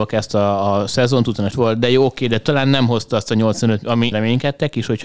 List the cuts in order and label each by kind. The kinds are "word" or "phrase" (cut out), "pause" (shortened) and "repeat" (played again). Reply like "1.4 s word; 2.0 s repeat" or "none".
1.5 s word; 4.1 s word